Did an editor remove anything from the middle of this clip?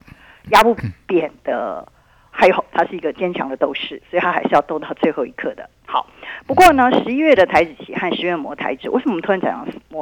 yes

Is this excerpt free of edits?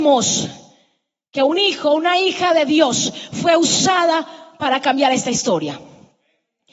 yes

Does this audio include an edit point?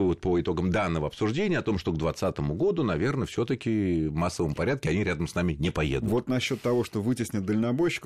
no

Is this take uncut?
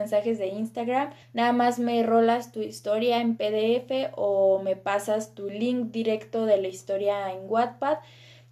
no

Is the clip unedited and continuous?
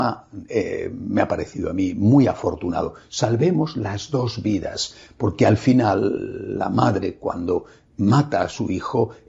yes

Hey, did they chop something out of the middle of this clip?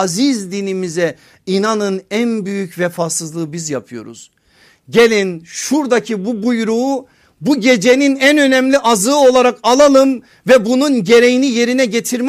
no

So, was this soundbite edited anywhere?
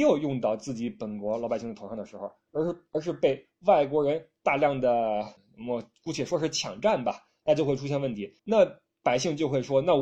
yes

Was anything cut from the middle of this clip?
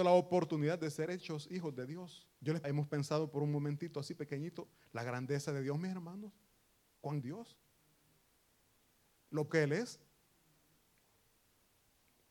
yes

